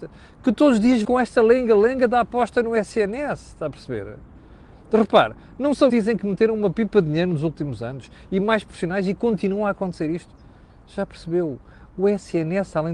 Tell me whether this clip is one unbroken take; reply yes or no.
no